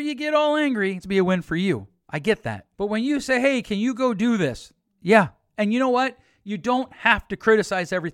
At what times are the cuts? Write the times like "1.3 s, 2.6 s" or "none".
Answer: 1.0 s, 2.7 s